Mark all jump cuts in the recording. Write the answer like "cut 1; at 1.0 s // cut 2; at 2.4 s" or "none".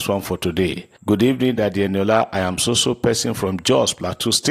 cut 1; at 1.0 s